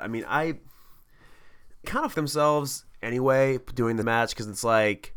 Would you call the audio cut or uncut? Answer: cut